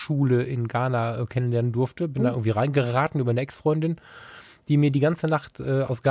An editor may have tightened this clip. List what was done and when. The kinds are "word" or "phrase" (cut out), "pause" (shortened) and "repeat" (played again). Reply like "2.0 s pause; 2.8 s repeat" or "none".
none